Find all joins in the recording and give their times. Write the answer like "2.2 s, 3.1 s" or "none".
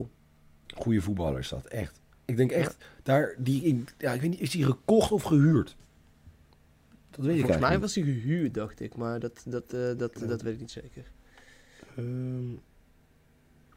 none